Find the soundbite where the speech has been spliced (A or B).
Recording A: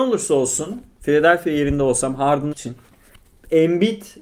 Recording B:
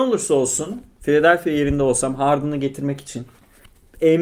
A